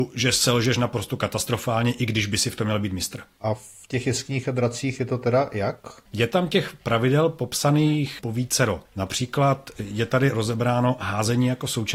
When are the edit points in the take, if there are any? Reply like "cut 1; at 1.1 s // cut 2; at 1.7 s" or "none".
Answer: none